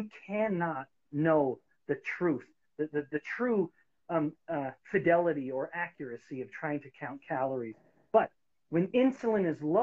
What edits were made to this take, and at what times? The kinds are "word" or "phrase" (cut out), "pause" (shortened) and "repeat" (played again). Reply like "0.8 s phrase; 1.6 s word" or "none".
none